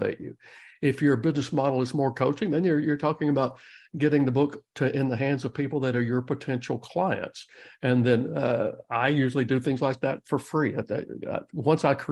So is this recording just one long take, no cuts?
yes; 0 cuts

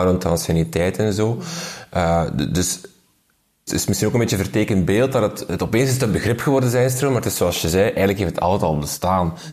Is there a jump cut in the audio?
yes; 1 cut; at 3.7 s

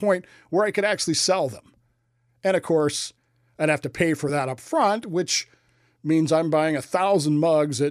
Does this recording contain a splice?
no; 0 cuts

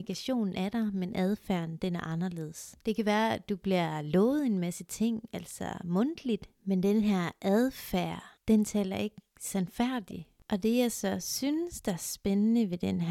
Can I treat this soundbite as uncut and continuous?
no; 3 cuts; at 2.8 s, 6.6 s, 8.4 s

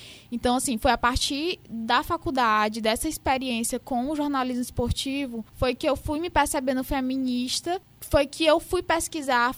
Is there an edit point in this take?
yes; 1 cut; at 5.5 s

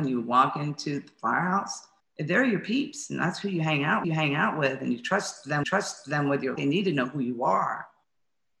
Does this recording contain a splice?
yes; 4 cuts; at 2.0 s, 4.0 s, 5.6 s, 6.6 s

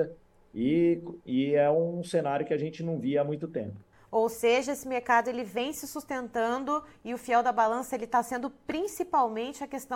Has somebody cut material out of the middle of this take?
yes; 1 cut; at 3.9 s

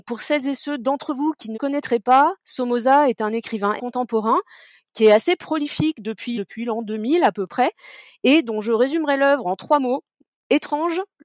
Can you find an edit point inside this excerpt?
yes; 3 cuts; at 1.5 s, 3.8 s, 6.3 s

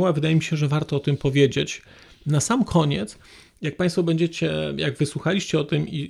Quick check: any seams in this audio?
no; 0 cuts

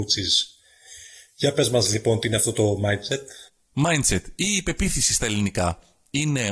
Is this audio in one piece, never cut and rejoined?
yes; 0 cuts

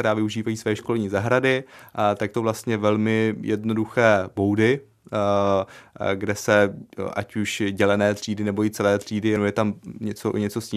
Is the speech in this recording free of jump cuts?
no; 2 cuts; at 2.3 s, 9.4 s

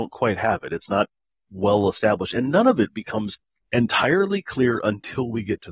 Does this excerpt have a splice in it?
no; 0 cuts

